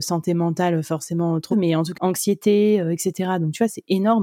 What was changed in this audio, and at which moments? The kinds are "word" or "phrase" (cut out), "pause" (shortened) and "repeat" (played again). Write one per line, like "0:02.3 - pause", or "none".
0:01.5 - word
0:01.9 - word